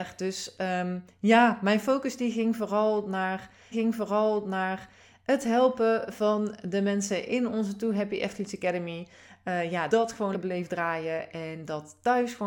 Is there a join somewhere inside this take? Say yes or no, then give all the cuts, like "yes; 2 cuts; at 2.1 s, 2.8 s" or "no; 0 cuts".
yes; 3 cuts; at 3.7 s, 9.9 s, 10.3 s